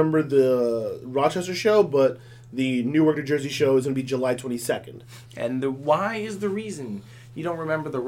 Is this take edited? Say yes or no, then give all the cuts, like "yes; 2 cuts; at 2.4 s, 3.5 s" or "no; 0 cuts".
yes; 1 cut; at 5.3 s